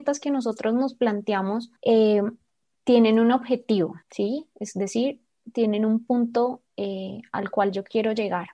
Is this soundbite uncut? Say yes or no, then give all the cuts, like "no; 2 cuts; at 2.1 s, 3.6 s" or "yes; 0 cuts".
no; 3 cuts; at 1.8 s, 4.0 s, 6.7 s